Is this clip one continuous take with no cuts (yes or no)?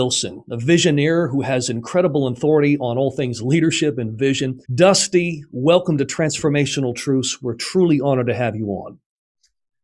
no